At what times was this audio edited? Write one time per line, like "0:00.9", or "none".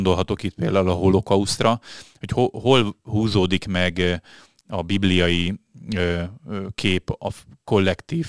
none